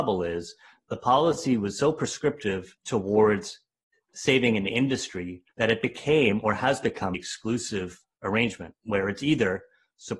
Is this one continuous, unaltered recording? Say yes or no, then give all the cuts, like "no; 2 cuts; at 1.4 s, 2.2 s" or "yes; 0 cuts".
no; 3 cuts; at 2.8 s, 5.5 s, 7.1 s